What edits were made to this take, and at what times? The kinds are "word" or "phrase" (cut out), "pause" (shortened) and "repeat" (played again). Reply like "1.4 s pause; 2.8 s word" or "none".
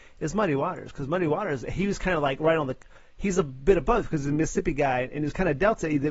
1.6 s word